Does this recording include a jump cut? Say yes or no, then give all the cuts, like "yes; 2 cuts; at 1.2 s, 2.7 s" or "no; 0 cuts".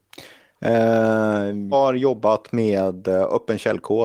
yes; 1 cut; at 1.7 s